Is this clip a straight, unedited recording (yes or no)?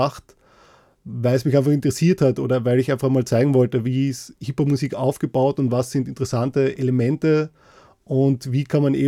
yes